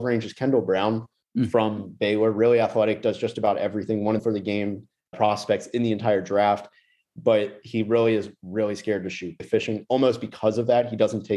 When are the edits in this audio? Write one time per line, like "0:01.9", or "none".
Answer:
0:04.2
0:05.1
0:09.4